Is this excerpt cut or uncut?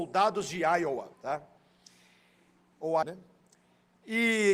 cut